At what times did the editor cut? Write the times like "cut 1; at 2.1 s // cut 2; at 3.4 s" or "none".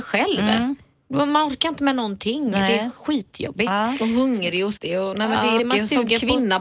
cut 1; at 4.8 s // cut 2; at 5.6 s